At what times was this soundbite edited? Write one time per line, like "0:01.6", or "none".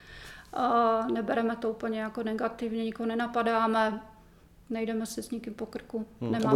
none